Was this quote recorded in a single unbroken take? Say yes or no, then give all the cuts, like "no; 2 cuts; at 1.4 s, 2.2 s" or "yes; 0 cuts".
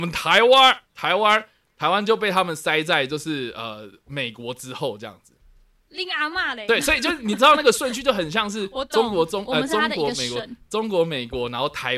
yes; 0 cuts